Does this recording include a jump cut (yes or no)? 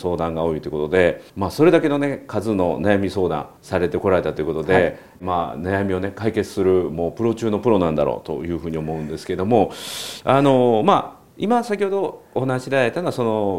yes